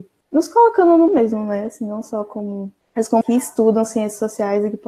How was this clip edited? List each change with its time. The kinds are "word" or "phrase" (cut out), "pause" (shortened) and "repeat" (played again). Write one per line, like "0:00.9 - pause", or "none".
0:01.1 - word
0:03.2 - word